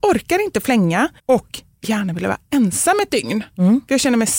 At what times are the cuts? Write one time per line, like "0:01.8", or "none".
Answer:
0:01.2
0:01.8